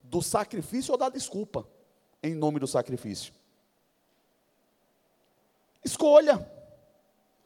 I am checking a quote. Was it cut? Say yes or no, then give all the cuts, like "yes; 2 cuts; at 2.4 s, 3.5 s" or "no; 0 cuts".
no; 0 cuts